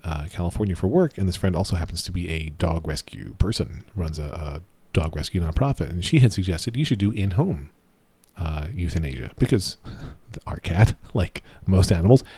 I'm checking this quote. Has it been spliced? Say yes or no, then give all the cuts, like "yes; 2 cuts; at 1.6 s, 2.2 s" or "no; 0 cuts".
no; 0 cuts